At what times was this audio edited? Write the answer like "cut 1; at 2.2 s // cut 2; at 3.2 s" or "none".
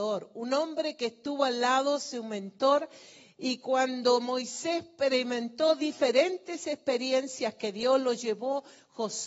none